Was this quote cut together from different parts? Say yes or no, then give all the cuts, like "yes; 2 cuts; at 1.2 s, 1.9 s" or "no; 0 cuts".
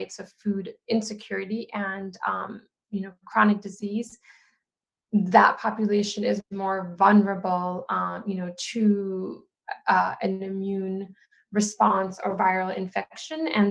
no; 0 cuts